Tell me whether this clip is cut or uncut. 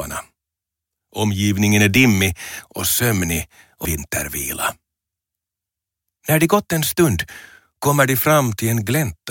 cut